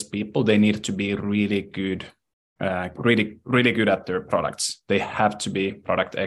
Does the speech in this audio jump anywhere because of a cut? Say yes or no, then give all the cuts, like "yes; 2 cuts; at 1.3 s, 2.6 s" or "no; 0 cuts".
no; 0 cuts